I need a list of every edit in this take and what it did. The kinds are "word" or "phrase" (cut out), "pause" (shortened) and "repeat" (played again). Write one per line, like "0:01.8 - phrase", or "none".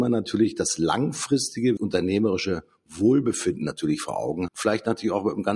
0:01.8 - word
0:04.5 - word